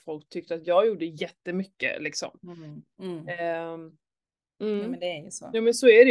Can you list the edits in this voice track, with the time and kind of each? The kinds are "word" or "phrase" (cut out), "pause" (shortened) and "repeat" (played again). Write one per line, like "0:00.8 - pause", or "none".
none